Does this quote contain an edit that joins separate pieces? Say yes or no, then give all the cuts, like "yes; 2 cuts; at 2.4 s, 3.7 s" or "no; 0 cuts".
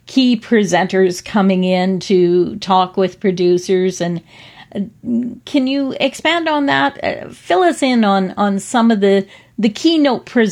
no; 0 cuts